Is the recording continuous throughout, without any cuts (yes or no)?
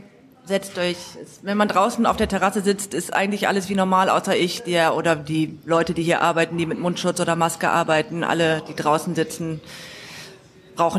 yes